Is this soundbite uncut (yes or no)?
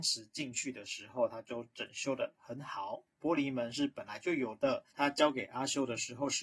no